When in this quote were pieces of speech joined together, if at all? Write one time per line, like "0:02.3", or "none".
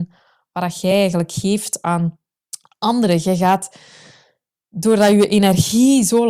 none